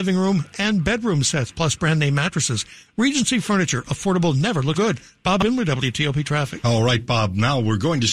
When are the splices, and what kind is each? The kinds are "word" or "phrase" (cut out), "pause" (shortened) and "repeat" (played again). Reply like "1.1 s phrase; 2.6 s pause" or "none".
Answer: 4.7 s word